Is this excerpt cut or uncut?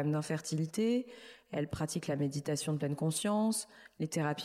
uncut